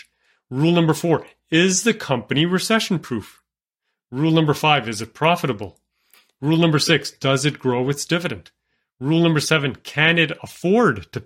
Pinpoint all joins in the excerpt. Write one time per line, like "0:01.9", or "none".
none